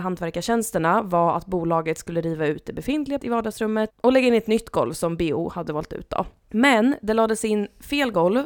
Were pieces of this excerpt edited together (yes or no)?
yes